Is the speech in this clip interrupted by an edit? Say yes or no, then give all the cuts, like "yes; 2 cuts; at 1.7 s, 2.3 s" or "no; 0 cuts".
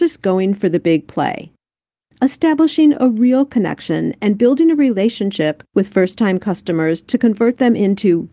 no; 0 cuts